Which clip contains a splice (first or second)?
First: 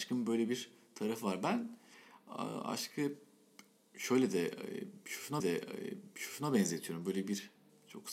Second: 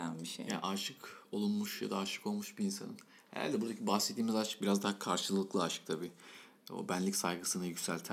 first